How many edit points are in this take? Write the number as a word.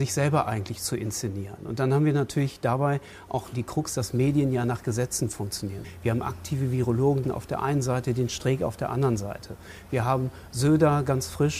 two